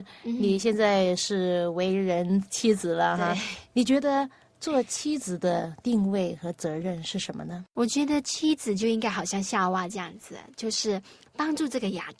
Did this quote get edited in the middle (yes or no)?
yes